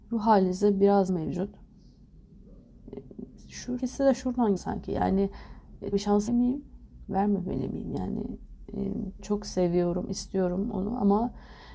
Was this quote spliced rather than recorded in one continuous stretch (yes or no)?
yes